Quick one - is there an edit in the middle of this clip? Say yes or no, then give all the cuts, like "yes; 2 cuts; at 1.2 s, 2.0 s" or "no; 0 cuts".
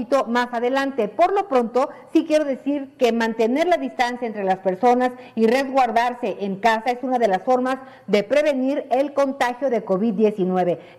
no; 0 cuts